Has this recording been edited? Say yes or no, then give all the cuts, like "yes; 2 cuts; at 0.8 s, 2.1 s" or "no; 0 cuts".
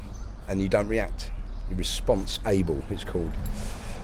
no; 0 cuts